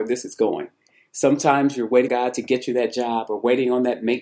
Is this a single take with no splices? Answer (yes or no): no